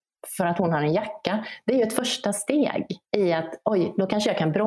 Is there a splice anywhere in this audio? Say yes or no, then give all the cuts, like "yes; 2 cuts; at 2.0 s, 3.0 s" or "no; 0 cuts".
yes; 1 cut; at 3.0 s